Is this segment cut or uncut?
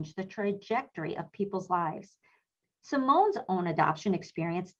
uncut